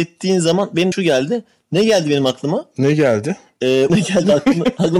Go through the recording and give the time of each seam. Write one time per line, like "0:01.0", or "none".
0:00.9
0:03.9